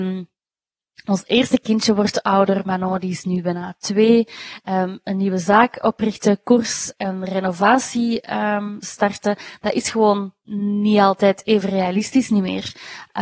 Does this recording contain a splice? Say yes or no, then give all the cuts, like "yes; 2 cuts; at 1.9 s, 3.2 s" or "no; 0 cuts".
yes; 1 cut; at 10.4 s